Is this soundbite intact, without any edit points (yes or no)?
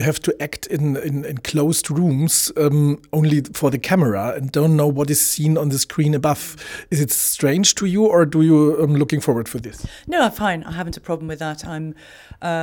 yes